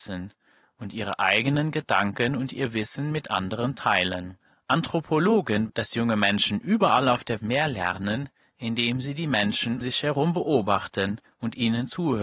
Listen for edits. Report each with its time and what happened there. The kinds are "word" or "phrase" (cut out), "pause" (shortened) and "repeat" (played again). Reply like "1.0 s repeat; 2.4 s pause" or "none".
5.7 s word; 7.4 s word; 9.8 s word